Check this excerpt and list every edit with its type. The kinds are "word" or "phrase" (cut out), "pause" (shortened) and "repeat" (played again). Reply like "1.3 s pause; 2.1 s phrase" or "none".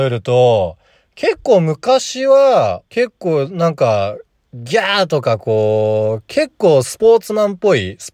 2.9 s pause